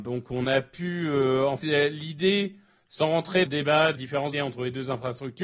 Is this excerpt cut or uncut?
cut